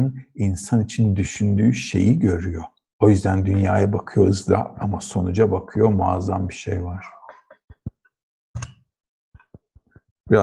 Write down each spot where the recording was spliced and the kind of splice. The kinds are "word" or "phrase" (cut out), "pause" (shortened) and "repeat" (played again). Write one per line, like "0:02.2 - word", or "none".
0:02.8 - pause
0:04.7 - word